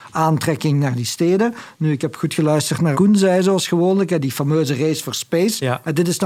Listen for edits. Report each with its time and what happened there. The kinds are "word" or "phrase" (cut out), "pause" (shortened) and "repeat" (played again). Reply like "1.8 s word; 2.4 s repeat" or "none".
2.9 s word